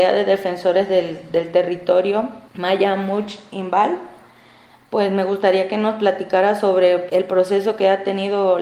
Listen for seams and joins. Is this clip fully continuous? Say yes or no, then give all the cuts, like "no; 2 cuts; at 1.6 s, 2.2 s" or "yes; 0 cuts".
yes; 0 cuts